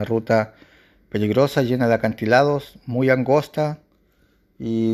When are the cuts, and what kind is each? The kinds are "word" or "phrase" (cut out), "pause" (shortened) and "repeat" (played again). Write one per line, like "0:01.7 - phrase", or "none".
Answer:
none

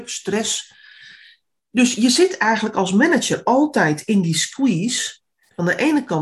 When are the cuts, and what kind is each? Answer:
none

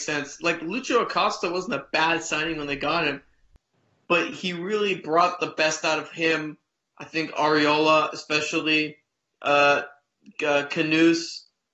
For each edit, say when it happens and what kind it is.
none

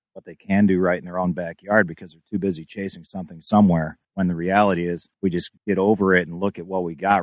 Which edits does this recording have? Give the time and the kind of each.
0:04.0 - pause
0:05.1 - pause
0:05.6 - pause

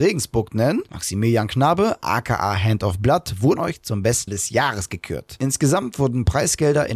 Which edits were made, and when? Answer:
0:03.6 - word
0:04.3 - word

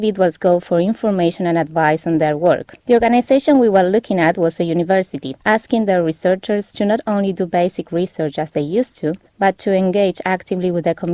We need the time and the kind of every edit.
0:02.8 - pause
0:05.4 - pause
0:09.3 - pause

